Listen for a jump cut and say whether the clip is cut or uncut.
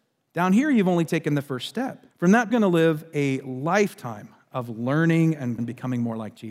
cut